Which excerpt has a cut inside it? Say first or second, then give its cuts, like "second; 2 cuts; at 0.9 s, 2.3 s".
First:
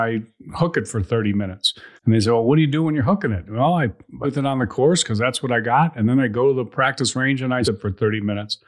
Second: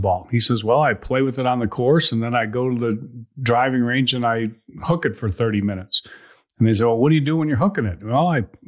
first; 3 cuts; at 2.0 s, 4.2 s, 7.6 s